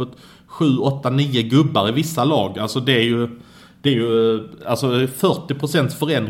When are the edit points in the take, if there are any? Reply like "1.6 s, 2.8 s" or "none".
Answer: none